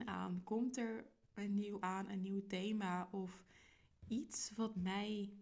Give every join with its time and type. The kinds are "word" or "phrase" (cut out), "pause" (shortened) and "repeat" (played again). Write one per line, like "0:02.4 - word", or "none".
0:01.8 - word